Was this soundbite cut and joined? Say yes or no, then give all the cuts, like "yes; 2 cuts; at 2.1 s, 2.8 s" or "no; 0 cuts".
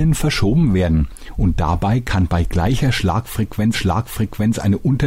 yes; 1 cut; at 3.7 s